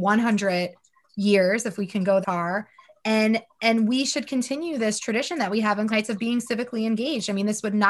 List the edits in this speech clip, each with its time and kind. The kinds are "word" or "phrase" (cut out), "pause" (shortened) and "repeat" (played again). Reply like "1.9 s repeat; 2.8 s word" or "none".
2.2 s word; 5.9 s word

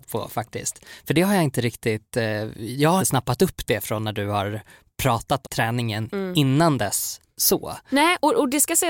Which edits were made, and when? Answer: 3.0 s word; 5.4 s word

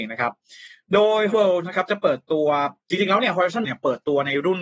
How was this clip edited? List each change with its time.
1.3 s word; 3.6 s word

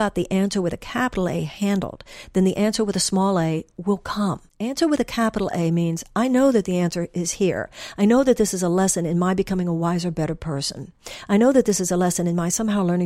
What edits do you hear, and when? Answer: 4.5 s pause

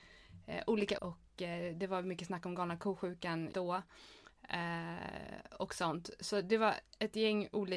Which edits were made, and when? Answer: 1.0 s word; 3.5 s word

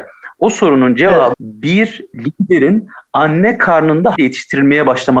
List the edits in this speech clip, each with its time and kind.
1.3 s word; 4.2 s word

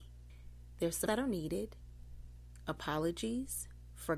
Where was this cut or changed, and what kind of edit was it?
1.1 s word

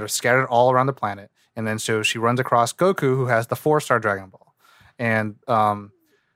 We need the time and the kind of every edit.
none

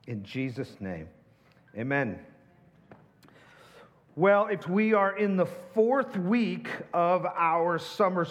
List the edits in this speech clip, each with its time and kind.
4.6 s phrase

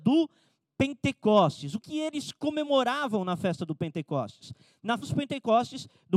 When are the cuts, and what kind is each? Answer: 1.8 s word; 5.0 s word

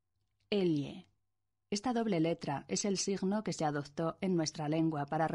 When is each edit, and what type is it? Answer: none

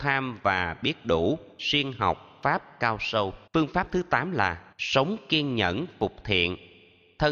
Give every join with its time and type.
1.5 s pause; 3.5 s pause; 4.7 s pause

